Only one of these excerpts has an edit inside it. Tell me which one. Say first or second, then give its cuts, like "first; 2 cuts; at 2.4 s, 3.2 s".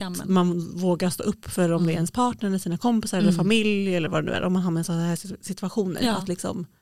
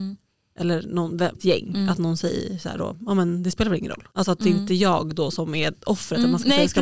second; 2 cuts; at 1.3 s, 4.1 s